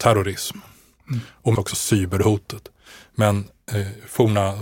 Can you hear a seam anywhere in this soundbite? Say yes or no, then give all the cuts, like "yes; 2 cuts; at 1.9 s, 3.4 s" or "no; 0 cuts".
yes; 1 cut; at 1.6 s